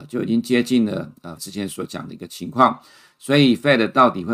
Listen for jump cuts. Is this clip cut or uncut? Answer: cut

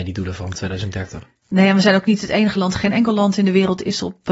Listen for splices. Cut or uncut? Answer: uncut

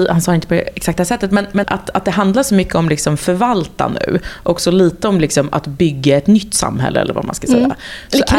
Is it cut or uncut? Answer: cut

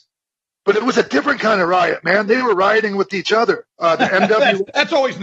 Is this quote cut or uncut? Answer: cut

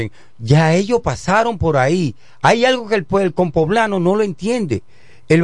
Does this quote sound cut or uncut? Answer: uncut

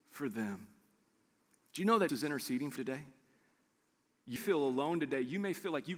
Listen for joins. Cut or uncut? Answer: cut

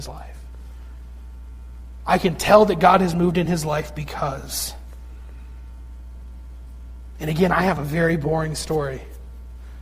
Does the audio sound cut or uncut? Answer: uncut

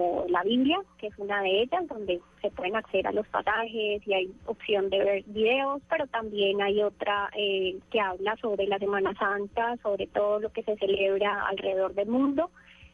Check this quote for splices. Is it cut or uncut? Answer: cut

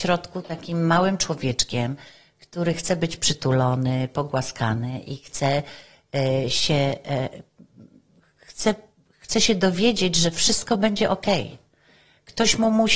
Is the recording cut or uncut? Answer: uncut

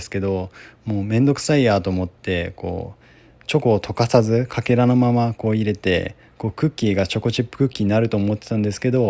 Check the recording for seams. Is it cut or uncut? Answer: uncut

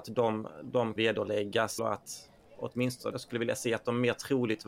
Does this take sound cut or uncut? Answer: cut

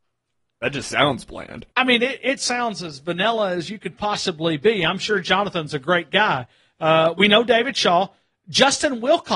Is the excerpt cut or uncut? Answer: cut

